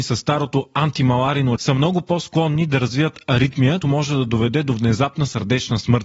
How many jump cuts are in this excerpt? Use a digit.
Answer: 2